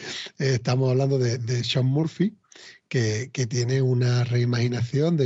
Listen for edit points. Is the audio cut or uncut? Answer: uncut